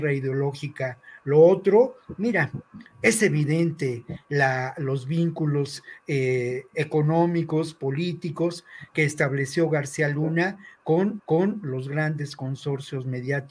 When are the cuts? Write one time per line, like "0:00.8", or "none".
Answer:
0:11.2